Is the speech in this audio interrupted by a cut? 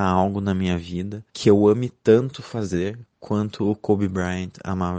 yes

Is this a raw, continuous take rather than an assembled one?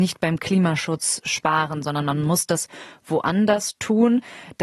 yes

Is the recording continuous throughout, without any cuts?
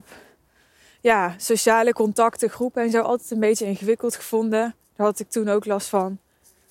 yes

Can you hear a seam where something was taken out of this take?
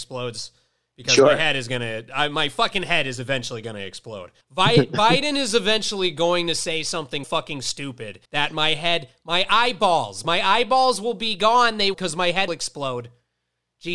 yes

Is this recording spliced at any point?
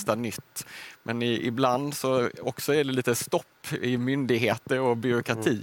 no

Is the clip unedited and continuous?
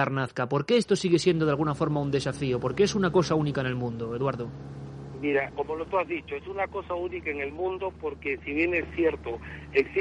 no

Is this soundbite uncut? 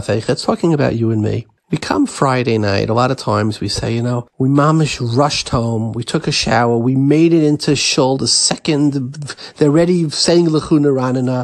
yes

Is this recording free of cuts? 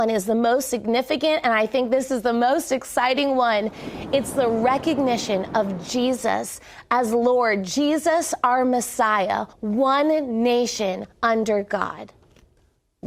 no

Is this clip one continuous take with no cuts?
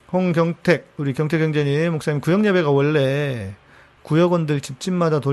yes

